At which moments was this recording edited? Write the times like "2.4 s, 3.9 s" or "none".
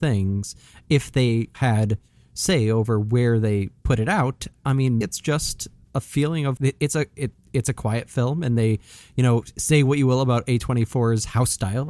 1.5 s, 5.0 s, 5.8 s, 6.6 s